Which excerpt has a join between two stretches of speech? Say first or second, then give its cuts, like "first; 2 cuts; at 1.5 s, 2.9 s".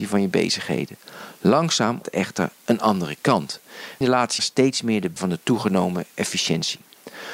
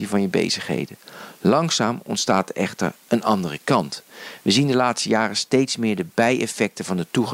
first; 4 cuts; at 2.0 s, 4.0 s, 4.4 s, 5.2 s